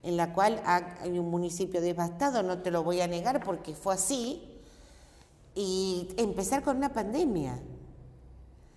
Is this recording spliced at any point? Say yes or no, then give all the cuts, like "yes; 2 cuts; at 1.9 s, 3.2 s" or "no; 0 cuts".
no; 0 cuts